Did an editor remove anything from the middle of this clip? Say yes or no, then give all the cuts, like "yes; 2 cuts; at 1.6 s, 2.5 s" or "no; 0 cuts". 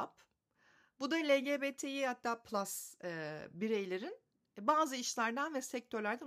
no; 0 cuts